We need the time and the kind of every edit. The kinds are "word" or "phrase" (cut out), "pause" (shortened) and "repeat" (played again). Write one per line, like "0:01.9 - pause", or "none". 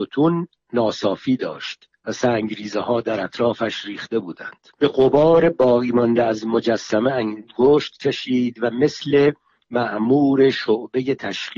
0:02.0 - pause
0:04.8 - pause

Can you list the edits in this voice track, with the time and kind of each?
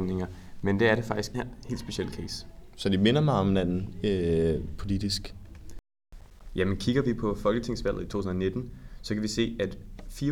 0:01.3 - phrase

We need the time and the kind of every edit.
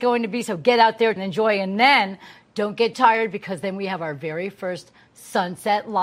0:01.2 - word
0:02.9 - word

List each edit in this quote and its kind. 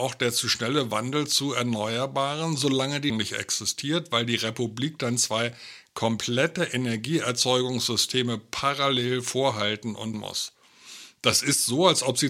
0:03.1 - word
0:10.1 - word

